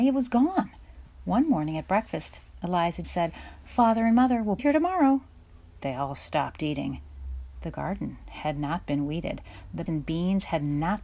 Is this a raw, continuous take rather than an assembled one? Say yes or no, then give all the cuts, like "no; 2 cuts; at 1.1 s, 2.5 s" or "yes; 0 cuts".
no; 3 cuts; at 3.0 s, 4.6 s, 9.9 s